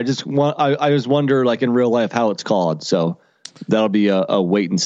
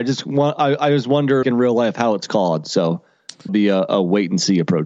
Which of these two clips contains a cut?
second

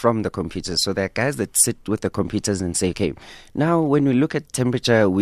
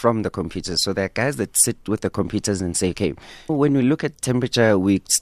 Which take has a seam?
second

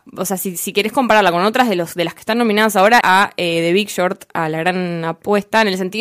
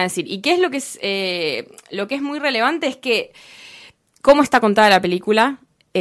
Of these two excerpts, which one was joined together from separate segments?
first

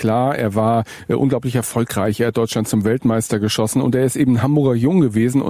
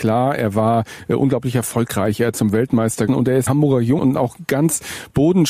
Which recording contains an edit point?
second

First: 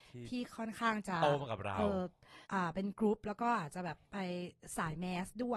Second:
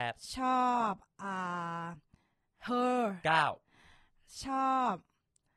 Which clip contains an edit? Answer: first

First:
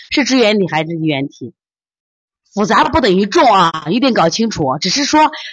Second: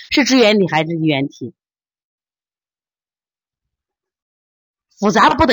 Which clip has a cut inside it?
first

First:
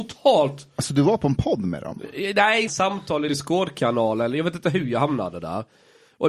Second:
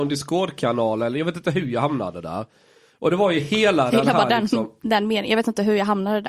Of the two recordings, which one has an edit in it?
first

